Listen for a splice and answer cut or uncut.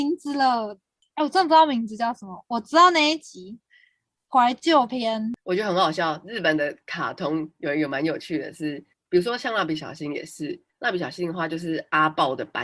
uncut